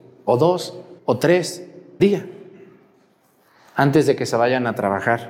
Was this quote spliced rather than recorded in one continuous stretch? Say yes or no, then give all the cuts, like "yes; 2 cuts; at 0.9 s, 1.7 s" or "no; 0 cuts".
yes; 2 cuts; at 1.0 s, 2.0 s